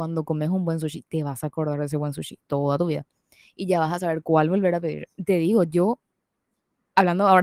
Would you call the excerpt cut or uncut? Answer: uncut